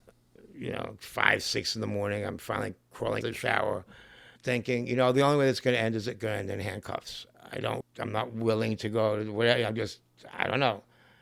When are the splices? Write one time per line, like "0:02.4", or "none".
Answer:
0:03.2
0:04.4
0:07.8